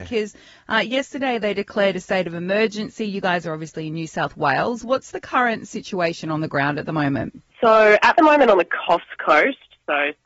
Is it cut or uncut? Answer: cut